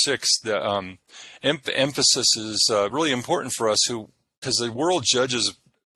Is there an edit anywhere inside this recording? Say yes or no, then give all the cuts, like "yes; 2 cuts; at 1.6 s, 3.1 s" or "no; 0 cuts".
no; 0 cuts